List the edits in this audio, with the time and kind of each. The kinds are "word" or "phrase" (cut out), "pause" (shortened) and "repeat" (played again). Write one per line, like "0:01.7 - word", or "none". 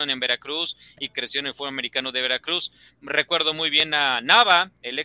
none